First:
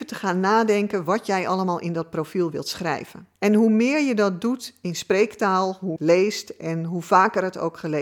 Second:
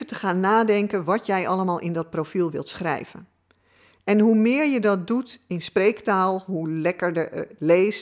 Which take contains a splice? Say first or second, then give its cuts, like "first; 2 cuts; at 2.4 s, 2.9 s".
first; 2 cuts; at 3.3 s, 6.0 s